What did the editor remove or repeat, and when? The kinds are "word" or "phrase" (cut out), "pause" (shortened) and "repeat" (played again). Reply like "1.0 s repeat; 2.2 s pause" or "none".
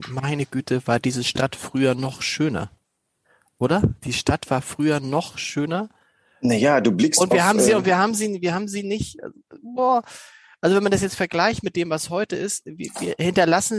none